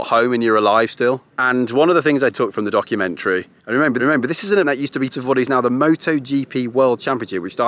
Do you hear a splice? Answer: yes; 6 cuts; at 1.3 s, 2.3 s, 3.6 s, 4.0 s, 4.6 s, 5.1 s

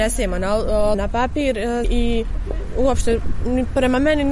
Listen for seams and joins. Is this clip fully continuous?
no; 2 cuts; at 0.9 s, 1.8 s

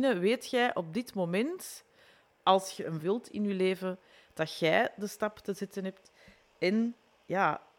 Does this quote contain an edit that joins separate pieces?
yes; 1 cut; at 3.0 s

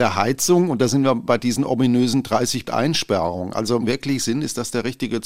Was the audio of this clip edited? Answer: yes; 3 cuts; at 1.3 s, 2.7 s, 3.8 s

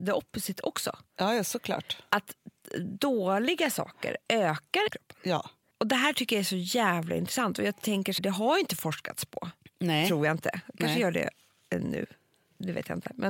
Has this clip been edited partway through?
yes; 2 cuts; at 4.9 s, 8.2 s

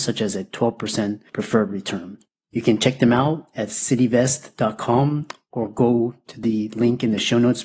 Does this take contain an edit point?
no; 0 cuts

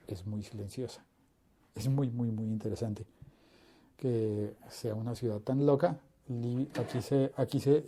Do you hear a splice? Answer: no; 0 cuts

